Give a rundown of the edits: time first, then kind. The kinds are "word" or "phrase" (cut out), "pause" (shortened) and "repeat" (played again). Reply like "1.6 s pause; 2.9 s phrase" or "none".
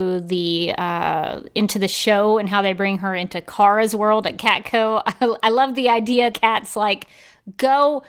6.3 s word